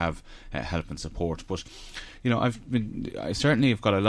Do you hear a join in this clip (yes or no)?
no